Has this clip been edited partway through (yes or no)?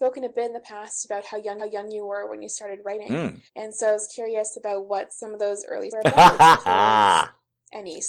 yes